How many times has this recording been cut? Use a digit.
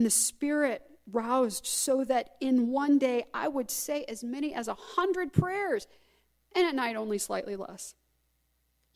0